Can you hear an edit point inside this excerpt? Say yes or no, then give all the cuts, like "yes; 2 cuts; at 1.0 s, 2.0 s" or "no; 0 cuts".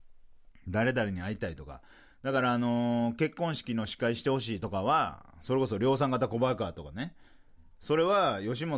no; 0 cuts